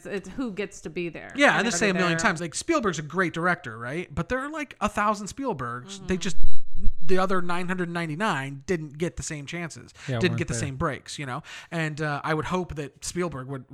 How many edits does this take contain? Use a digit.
2